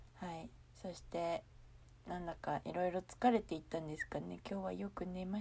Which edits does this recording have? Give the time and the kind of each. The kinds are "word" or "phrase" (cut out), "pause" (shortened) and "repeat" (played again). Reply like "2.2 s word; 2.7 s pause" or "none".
none